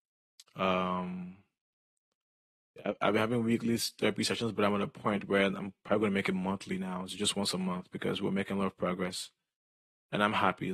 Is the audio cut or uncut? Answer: uncut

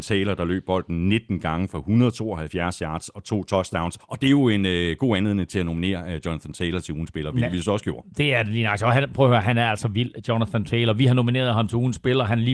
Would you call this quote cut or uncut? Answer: cut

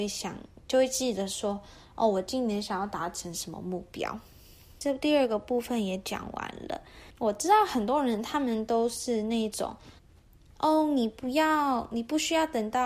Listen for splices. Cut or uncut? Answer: cut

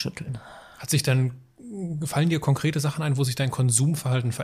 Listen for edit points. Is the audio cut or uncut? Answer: uncut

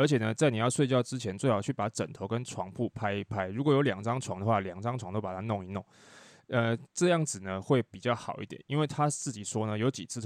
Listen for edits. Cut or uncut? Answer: uncut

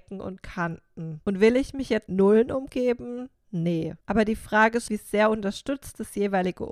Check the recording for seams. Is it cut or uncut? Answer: cut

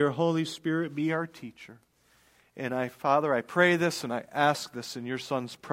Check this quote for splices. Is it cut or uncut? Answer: uncut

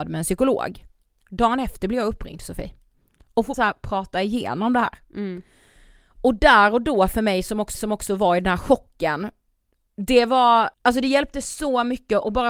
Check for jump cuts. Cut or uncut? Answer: cut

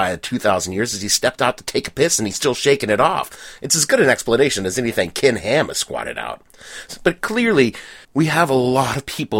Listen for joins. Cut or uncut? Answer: cut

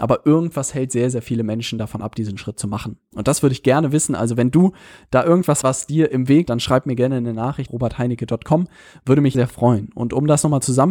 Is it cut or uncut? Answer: cut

